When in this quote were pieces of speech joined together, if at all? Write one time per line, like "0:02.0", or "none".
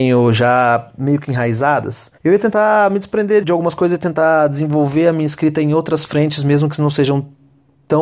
0:02.2
0:03.4